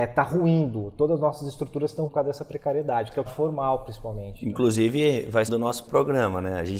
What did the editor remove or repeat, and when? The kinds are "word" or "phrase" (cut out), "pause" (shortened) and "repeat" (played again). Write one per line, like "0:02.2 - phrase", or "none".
0:02.1 - word
0:03.3 - word
0:05.5 - phrase
0:05.9 - word